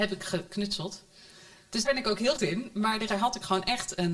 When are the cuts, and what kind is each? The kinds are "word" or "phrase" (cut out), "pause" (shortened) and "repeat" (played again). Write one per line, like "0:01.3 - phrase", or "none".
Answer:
0:01.8 - word
0:02.4 - word
0:03.1 - word